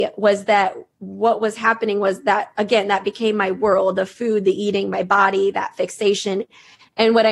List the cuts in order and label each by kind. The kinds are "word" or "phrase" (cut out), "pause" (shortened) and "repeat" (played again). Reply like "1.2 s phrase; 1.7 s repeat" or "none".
none